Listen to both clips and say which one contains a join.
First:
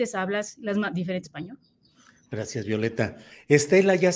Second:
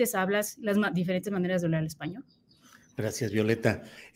first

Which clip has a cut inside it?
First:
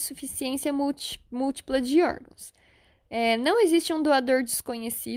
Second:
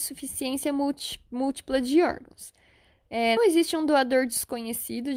second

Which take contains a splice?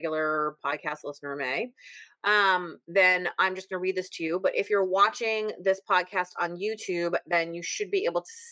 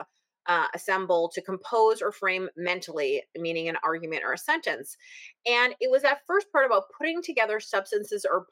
first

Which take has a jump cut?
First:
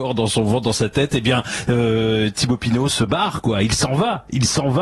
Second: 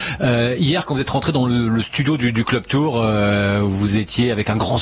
first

